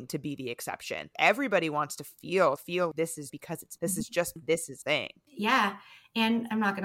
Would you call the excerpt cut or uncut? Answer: cut